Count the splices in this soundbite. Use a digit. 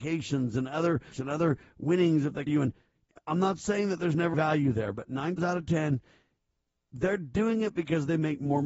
4